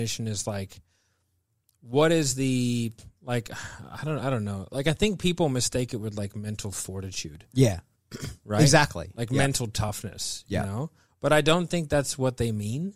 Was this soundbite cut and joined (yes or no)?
no